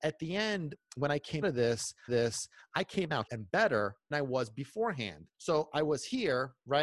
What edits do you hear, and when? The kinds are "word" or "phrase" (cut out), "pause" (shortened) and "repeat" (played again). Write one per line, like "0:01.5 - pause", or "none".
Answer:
0:01.4 - word
0:02.1 - repeat
0:03.3 - word
0:04.1 - word
0:05.3 - pause